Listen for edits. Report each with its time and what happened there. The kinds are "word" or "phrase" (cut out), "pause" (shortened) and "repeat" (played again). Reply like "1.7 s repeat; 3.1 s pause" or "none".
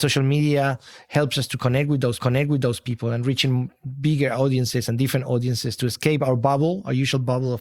2.2 s repeat